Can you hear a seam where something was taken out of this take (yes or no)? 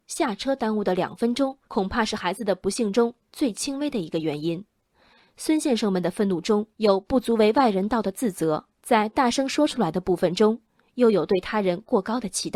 yes